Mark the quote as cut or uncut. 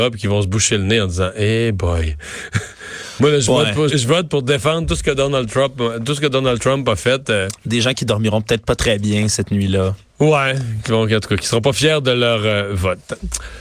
cut